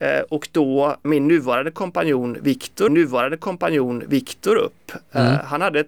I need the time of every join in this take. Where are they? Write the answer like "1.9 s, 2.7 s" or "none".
1.0 s, 2.9 s